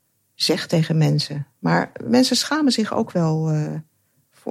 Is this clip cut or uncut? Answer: uncut